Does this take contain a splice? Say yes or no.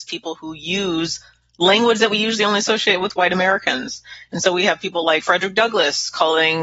no